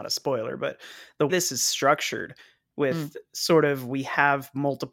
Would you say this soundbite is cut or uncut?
cut